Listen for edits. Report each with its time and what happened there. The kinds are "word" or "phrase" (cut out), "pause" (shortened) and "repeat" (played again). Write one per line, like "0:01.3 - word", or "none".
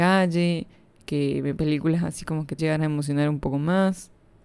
0:01.6 - word
0:02.6 - word